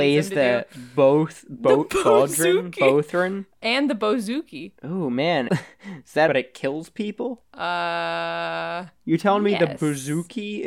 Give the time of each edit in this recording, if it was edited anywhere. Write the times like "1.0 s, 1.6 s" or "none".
5.5 s, 6.3 s